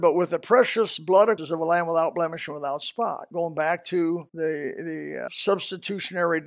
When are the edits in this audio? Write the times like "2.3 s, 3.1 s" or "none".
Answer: 1.4 s, 4.3 s, 5.3 s

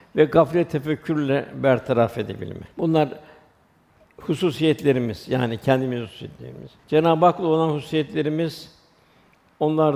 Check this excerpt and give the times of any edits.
2.7 s, 6.8 s

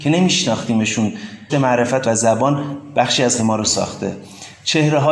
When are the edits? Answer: 1.5 s, 2.0 s, 3.4 s

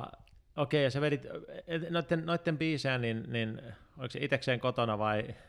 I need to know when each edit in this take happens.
none

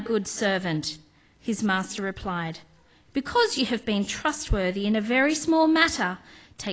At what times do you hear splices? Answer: none

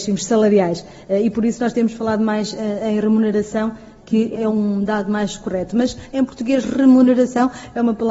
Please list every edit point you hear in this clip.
4.3 s

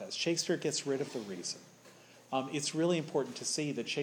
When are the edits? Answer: none

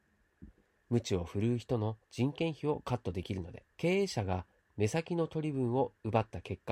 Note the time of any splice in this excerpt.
2.0 s, 3.7 s

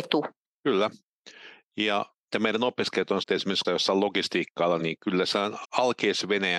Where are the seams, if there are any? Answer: 2.3 s, 3.2 s, 3.6 s, 4.8 s, 5.6 s

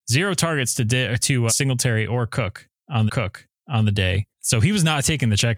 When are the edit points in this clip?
1.5 s, 3.1 s, 4.3 s

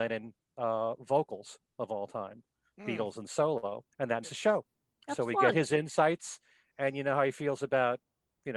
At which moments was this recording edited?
3.9 s, 4.2 s

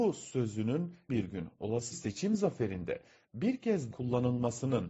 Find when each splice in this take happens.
1.1 s, 1.9 s, 3.9 s

